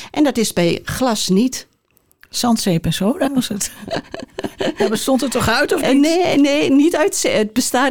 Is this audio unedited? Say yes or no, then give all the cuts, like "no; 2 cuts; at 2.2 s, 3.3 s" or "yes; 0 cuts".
no; 1 cut; at 3.3 s